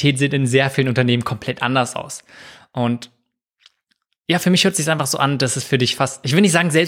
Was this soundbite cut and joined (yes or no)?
no